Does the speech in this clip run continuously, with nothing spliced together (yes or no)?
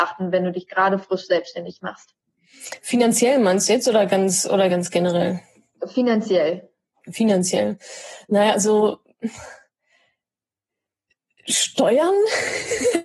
yes